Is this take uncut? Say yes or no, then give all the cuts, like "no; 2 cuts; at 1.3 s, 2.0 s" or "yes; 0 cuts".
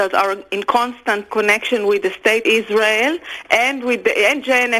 no; 2 cuts; at 1.3 s, 2.4 s